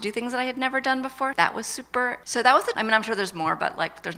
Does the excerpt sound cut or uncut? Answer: cut